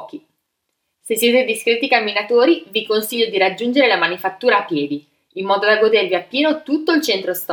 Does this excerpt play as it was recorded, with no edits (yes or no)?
yes